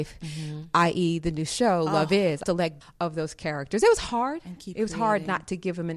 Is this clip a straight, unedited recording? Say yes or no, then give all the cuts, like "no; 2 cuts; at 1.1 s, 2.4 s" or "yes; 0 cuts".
no; 2 cuts; at 2.4 s, 2.8 s